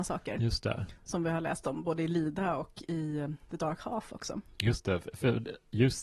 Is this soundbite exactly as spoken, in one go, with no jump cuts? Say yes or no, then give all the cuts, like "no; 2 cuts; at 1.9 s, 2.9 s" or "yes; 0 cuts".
yes; 0 cuts